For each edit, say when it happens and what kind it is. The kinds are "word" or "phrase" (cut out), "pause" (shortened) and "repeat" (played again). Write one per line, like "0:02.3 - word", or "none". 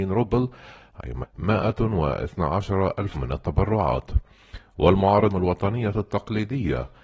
0:01.2 - word
0:03.1 - word
0:05.3 - phrase